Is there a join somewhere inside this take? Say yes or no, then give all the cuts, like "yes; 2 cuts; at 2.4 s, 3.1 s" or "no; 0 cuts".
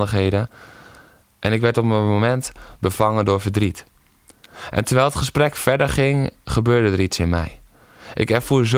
no; 0 cuts